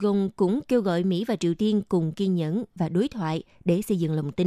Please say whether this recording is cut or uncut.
uncut